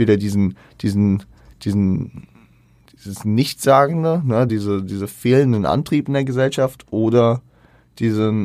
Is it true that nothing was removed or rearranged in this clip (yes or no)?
yes